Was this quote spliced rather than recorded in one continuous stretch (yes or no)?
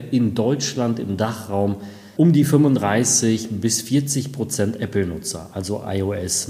yes